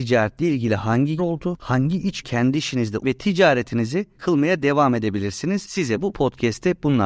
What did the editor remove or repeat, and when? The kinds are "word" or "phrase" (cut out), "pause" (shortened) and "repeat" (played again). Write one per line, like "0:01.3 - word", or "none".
0:01.2 - word
0:02.2 - word
0:03.0 - word
0:04.1 - word